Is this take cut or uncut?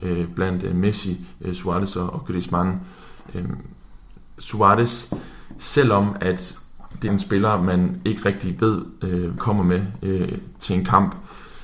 cut